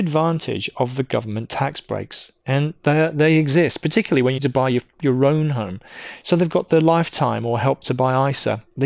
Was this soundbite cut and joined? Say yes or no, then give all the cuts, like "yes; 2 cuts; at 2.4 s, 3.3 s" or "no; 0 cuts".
yes; 1 cut; at 4.4 s